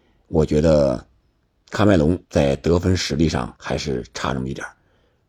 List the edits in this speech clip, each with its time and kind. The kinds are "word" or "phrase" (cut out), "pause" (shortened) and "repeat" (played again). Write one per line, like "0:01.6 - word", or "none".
0:02.2 - pause
0:03.6 - pause